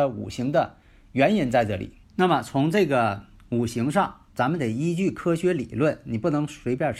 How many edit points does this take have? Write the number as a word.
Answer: two